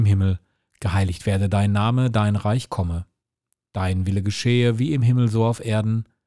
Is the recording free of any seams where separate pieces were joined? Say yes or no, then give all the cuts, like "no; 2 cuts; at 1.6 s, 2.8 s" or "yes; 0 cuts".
yes; 0 cuts